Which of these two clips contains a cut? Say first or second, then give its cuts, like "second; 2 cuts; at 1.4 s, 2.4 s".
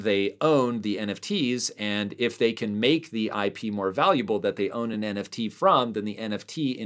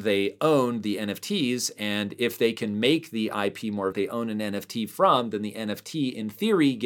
second; 1 cut; at 3.9 s